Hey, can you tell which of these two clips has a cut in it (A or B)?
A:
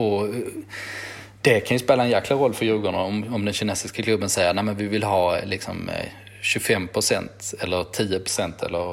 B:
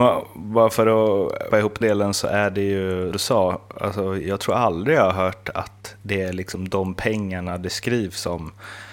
B